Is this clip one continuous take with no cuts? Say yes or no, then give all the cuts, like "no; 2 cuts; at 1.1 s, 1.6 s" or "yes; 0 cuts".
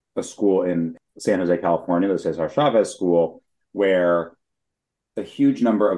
yes; 0 cuts